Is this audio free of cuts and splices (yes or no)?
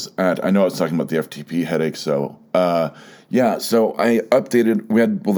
yes